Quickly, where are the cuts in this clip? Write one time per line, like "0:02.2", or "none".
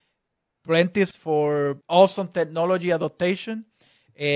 0:01.1
0:01.8